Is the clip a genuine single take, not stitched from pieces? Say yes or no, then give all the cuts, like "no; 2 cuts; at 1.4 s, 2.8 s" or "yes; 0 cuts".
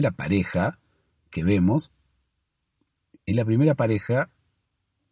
yes; 0 cuts